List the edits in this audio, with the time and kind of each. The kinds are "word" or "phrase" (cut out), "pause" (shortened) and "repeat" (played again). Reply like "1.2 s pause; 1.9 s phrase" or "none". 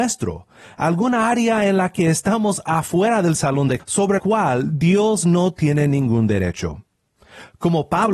3.8 s word; 4.2 s word